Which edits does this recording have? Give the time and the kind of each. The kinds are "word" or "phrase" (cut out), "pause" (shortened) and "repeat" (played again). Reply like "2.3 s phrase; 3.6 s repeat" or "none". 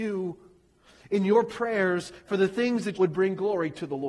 2.9 s phrase